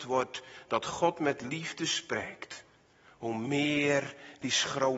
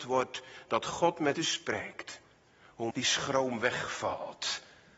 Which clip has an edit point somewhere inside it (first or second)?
second